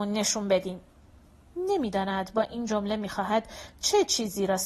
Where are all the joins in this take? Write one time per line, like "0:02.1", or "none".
none